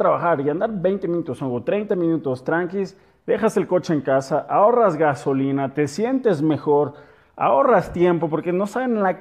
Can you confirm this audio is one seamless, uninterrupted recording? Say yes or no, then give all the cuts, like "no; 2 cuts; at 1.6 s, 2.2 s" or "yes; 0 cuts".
yes; 0 cuts